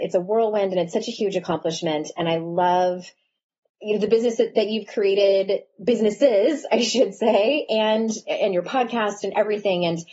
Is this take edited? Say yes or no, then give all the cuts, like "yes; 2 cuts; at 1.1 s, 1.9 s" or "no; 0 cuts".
no; 0 cuts